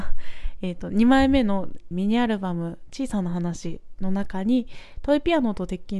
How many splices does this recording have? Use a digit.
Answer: 1